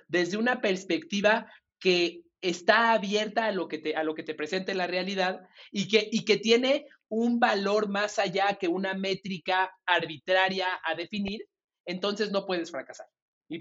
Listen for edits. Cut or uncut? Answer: uncut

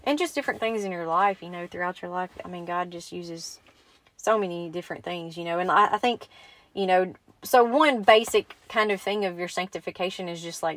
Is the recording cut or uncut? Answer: uncut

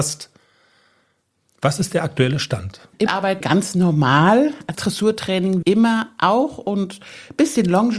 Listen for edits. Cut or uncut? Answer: cut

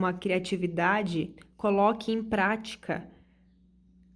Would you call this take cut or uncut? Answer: uncut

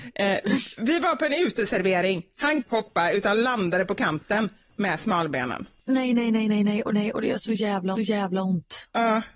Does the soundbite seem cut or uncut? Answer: cut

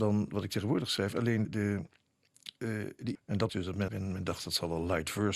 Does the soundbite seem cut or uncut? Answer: cut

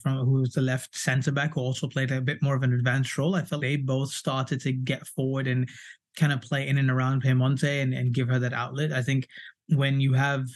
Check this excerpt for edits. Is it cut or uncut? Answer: cut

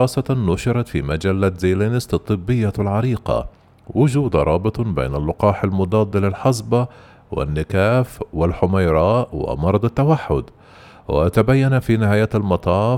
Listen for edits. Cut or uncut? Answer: uncut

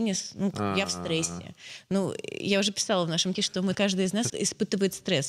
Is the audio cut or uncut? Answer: cut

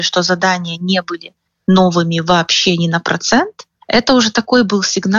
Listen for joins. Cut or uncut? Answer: cut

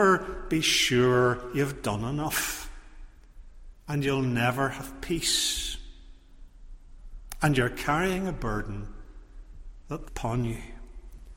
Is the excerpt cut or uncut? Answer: cut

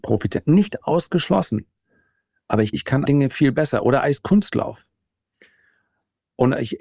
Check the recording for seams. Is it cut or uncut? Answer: cut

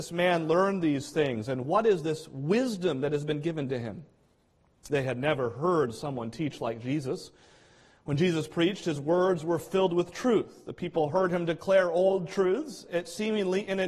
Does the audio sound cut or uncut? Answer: uncut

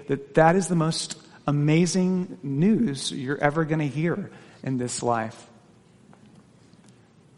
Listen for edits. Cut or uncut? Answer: uncut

